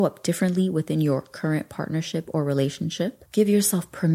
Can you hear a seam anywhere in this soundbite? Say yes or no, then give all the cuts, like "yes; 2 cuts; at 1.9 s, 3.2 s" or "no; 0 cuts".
no; 0 cuts